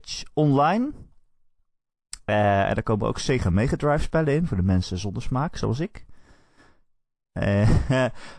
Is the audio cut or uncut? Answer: uncut